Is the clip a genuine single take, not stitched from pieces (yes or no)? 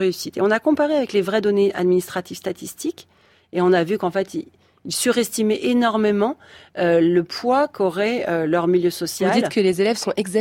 yes